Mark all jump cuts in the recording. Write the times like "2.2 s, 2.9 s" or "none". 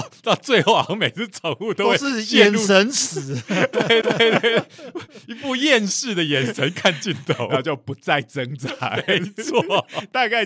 4.0 s